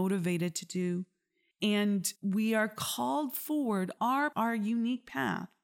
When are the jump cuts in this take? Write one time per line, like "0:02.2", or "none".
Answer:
0:02.2
0:04.0
0:04.3